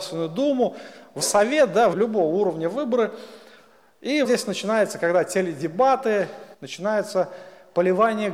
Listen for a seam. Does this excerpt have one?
yes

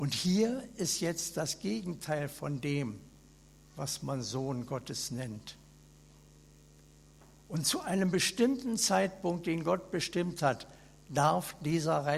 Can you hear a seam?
no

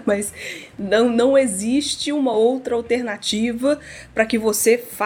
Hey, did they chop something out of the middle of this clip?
no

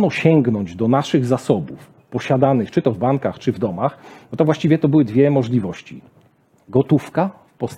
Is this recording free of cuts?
yes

